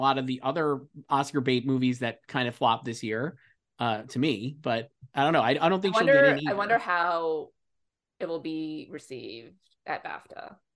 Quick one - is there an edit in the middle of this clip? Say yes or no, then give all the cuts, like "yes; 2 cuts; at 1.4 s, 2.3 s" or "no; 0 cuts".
no; 0 cuts